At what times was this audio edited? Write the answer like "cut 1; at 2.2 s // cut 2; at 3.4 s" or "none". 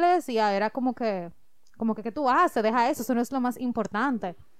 none